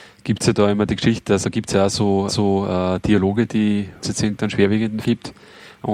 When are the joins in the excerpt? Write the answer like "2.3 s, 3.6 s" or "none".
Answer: 1.4 s, 2.3 s, 4.0 s, 5.0 s